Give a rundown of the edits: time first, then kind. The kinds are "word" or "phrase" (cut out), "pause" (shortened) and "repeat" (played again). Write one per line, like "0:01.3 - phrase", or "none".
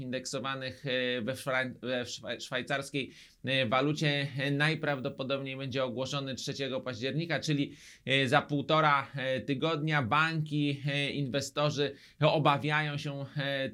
none